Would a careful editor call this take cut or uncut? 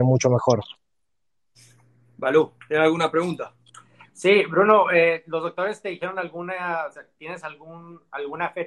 uncut